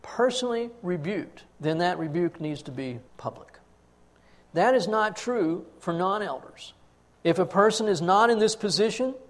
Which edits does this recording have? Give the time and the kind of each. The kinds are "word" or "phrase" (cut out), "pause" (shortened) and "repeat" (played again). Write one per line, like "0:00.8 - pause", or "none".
0:01.5 - pause
0:03.1 - pause
0:06.9 - pause